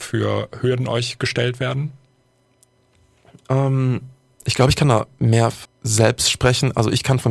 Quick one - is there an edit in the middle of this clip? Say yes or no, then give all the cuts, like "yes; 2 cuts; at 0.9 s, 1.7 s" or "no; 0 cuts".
yes; 1 cut; at 5.6 s